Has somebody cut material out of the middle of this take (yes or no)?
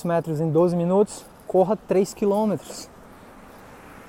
no